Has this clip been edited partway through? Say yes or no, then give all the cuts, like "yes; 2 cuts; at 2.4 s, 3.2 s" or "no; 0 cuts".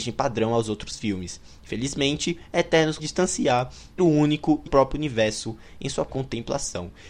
yes; 4 cuts; at 3.0 s, 4.0 s, 4.7 s, 6.1 s